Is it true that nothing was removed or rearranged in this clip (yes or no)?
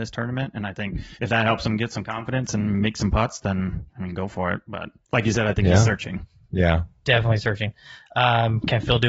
no